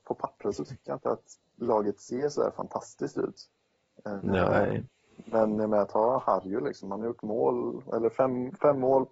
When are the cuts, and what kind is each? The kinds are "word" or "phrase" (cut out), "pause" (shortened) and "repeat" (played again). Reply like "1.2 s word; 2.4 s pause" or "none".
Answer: none

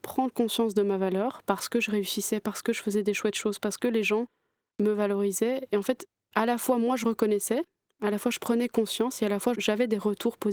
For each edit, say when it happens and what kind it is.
none

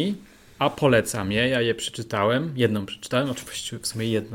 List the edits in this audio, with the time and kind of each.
none

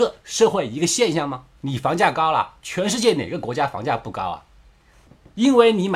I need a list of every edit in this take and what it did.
1.6 s pause; 2.6 s pause

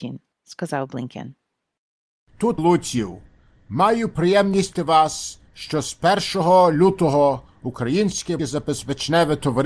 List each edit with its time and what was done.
2.6 s phrase; 4.8 s word; 8.4 s word

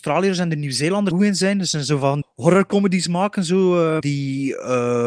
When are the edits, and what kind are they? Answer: 1.1 s phrase; 2.2 s word; 4.0 s word

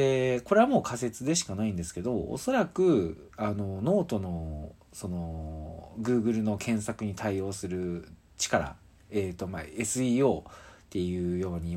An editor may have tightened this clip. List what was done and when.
none

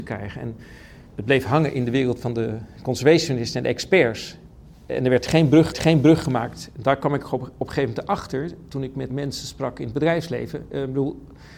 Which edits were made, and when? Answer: 1.1 s pause; 5.7 s repeat; 9.1 s word

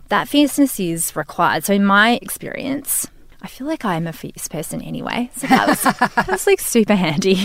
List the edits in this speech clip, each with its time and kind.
none

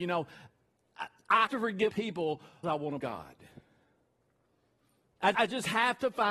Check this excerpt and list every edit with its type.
1.5 s word; 1.9 s word; 2.6 s word; 3.0 s word; 5.3 s word

